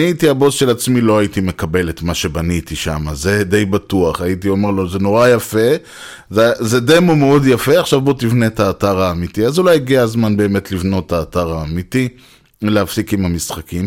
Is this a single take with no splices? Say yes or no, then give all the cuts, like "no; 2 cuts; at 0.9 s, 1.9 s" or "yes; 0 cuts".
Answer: yes; 0 cuts